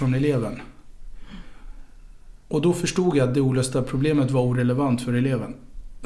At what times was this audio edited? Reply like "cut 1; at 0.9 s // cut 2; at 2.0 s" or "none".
none